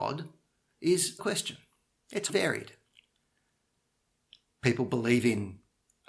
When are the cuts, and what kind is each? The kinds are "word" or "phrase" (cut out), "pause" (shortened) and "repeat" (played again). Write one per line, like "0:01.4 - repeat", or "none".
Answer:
0:01.2 - word
0:02.3 - word